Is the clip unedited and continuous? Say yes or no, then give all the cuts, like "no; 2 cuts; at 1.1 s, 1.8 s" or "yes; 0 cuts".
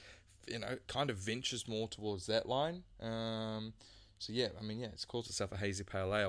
yes; 0 cuts